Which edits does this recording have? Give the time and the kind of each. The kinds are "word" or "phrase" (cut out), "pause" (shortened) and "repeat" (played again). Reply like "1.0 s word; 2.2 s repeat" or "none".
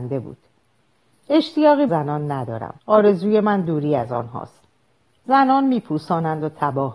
1.9 s phrase; 2.8 s pause